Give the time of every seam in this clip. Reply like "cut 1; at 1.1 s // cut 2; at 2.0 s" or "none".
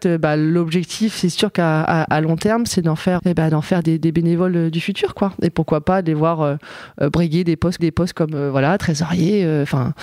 cut 1; at 3.2 s // cut 2; at 3.8 s // cut 3; at 7.8 s